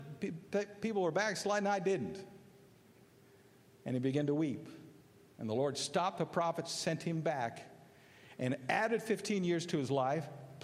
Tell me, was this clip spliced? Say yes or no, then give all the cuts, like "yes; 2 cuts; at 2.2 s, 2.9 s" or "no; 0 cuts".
no; 0 cuts